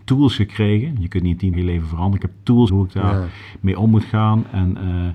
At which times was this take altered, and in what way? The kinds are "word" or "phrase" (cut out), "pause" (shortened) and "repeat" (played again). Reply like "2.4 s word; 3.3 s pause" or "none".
1.5 s word; 2.7 s word